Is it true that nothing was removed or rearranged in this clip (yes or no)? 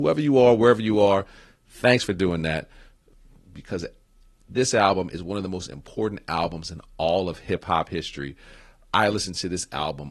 yes